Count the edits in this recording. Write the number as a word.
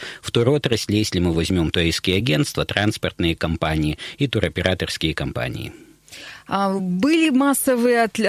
zero